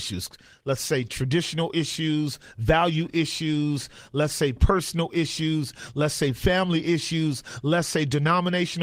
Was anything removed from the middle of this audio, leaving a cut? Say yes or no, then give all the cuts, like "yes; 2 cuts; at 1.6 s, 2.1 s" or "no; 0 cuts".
no; 0 cuts